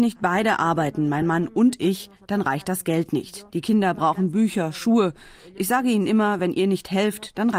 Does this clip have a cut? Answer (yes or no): no